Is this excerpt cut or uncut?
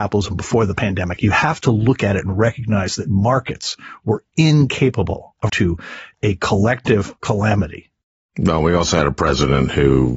cut